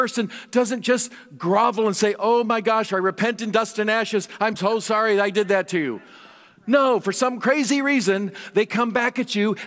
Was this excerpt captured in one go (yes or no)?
yes